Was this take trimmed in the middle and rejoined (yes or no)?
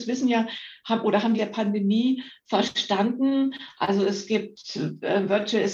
yes